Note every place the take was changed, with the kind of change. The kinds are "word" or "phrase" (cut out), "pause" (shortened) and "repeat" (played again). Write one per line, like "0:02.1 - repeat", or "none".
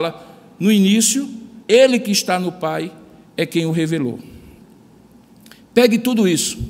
0:01.6 - pause